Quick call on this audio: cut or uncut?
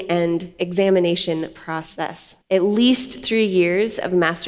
cut